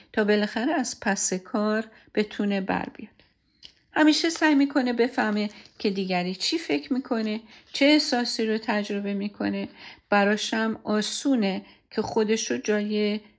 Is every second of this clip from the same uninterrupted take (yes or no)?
yes